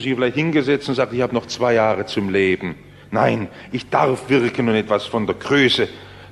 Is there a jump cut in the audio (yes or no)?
no